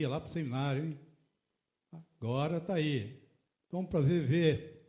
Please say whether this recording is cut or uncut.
cut